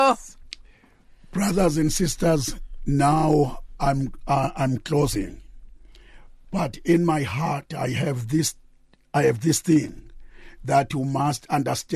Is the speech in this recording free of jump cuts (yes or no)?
yes